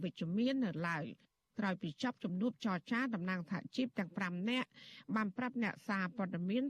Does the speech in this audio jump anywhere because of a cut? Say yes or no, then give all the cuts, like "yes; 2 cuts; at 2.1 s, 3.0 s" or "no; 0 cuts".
no; 0 cuts